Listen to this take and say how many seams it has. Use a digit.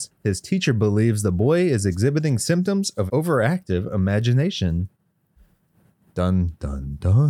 1